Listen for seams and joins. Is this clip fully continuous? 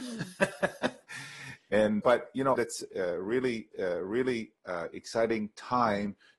no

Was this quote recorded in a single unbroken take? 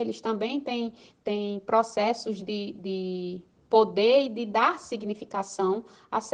yes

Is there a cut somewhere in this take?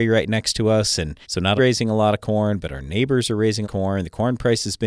yes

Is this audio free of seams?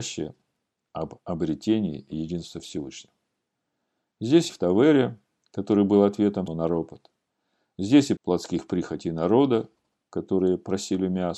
no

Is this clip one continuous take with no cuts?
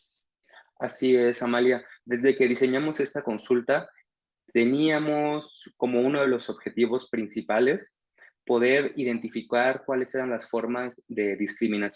yes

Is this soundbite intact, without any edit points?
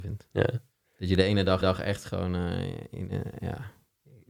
no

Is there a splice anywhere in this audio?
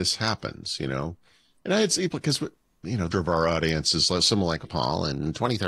yes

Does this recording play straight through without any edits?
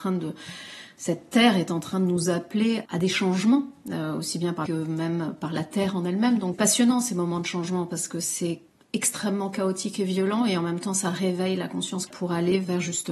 no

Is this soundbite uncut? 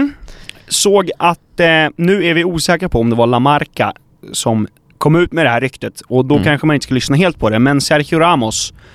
yes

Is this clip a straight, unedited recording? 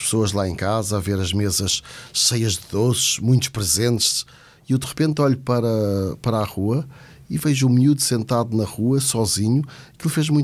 yes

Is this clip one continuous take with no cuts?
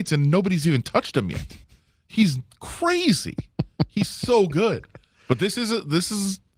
yes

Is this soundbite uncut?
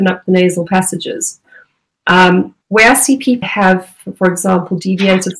no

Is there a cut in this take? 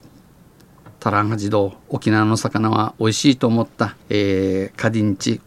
yes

